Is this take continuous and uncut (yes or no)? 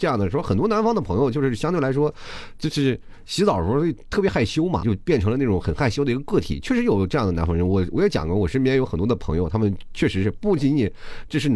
no